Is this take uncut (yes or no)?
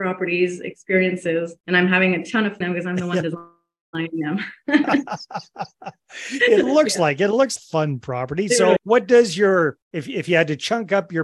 no